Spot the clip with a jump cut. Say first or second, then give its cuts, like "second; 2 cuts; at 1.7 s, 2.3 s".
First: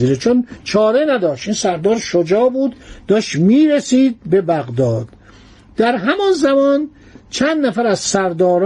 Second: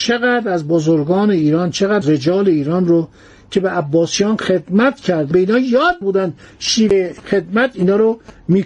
second; 3 cuts; at 2.0 s, 5.3 s, 6.0 s